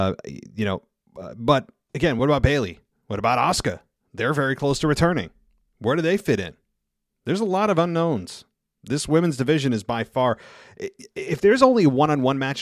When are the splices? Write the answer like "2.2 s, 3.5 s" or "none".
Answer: none